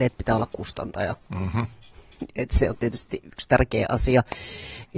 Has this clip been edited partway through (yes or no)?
yes